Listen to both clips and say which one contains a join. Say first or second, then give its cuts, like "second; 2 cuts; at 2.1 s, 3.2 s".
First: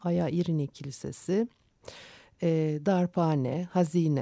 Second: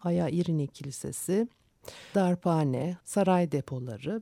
second; 2 cuts; at 2.1 s, 3.0 s